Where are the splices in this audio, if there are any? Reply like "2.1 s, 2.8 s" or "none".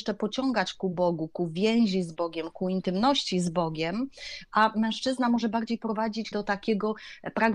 6.3 s